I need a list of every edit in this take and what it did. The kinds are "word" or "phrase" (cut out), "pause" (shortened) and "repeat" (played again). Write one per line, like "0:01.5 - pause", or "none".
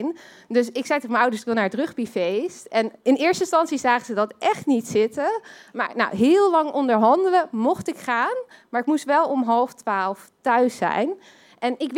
none